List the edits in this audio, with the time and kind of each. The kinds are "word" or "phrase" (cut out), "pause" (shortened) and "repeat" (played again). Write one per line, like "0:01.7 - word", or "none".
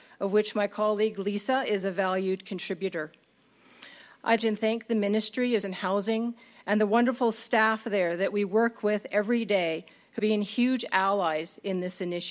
0:04.4 - phrase
0:05.6 - word
0:10.2 - word